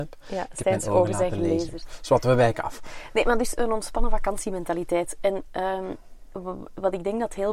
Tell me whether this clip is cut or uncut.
uncut